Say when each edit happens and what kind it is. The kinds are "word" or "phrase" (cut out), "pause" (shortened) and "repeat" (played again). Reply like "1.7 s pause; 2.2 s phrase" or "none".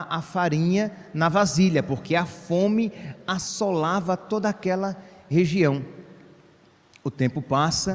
none

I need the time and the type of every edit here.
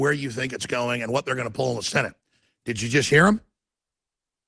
none

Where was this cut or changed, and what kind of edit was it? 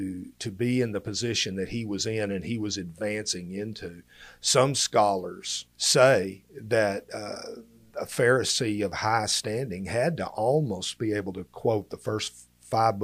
5.7 s pause

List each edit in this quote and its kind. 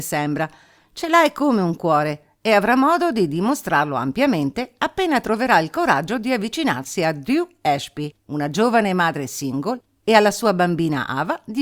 8.2 s pause

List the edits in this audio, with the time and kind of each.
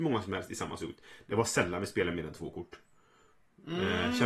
none

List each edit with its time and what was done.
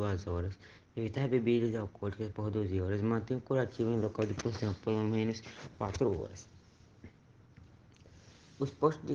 none

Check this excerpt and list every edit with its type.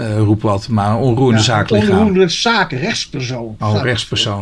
none

